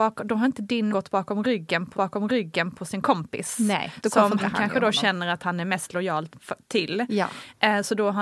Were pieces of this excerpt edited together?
yes; 3 cuts; at 0.9 s, 1.9 s, 4.4 s

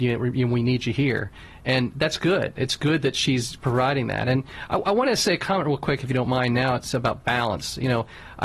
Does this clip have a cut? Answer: no; 0 cuts

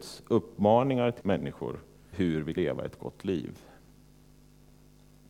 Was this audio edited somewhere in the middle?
yes; 3 cuts; at 1.2 s, 2.1 s, 2.6 s

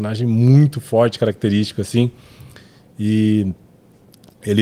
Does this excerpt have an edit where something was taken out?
no; 0 cuts

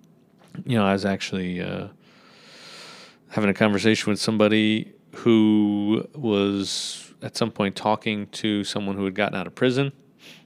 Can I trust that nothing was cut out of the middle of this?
yes; 0 cuts

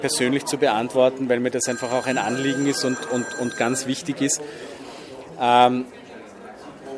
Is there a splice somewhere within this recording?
no; 0 cuts

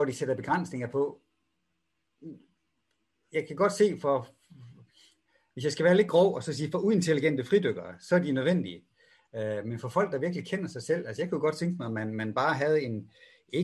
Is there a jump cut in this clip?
no; 0 cuts

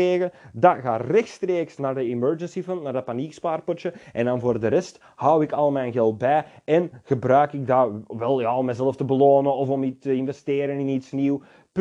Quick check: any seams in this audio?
no; 0 cuts

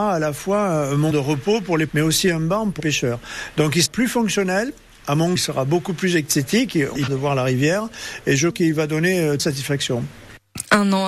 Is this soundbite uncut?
no; 8 cuts; at 1.1 s, 1.9 s, 2.8 s, 3.9 s, 5.4 s, 7.1 s, 8.5 s, 9.4 s

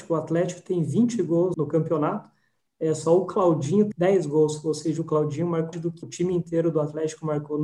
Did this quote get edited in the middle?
yes; 4 cuts; at 1.5 s, 3.9 s, 5.7 s, 6.0 s

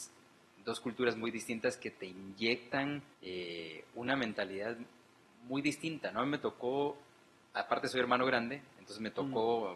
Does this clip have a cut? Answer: yes; 1 cut; at 3.1 s

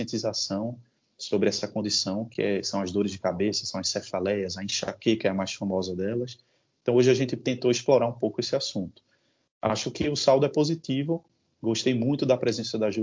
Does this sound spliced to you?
no; 0 cuts

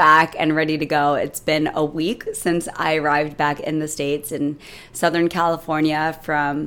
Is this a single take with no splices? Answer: yes; 0 cuts

